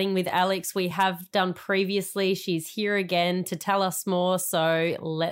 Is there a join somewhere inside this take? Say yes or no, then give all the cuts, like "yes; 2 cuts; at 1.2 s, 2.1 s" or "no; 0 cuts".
no; 0 cuts